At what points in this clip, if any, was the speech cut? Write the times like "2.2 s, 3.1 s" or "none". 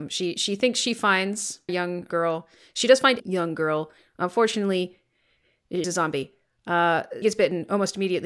1.7 s, 2.1 s, 3.2 s, 5.8 s, 7.2 s